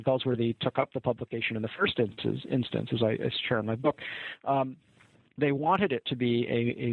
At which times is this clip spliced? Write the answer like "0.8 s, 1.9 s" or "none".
none